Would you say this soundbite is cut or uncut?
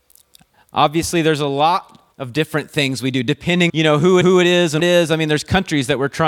cut